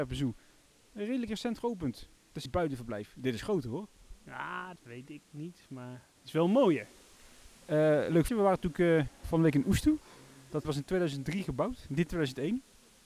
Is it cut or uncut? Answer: cut